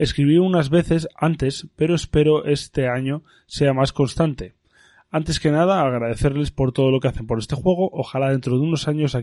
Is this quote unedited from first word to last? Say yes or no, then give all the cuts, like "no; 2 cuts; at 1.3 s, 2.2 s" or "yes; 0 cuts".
yes; 0 cuts